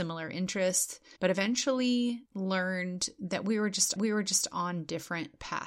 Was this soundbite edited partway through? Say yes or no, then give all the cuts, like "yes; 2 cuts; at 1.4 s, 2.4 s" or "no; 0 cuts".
yes; 3 cuts; at 1.2 s, 2.3 s, 4.0 s